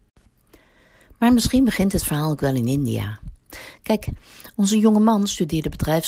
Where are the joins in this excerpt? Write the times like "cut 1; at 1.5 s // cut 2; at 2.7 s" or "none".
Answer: none